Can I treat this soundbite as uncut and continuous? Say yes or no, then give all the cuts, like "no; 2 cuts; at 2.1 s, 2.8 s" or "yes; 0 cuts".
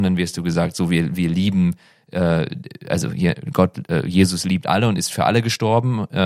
yes; 0 cuts